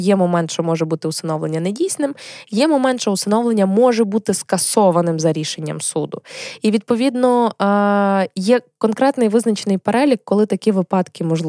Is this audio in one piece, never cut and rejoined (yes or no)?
yes